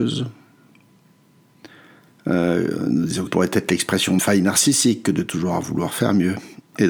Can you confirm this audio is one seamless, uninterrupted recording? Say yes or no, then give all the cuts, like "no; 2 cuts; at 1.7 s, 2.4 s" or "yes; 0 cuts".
no; 2 cuts; at 3.3 s, 4.2 s